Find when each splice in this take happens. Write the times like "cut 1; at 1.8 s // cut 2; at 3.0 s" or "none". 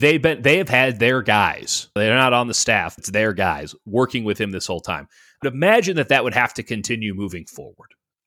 cut 1; at 2.0 s // cut 2; at 3.0 s // cut 3; at 5.4 s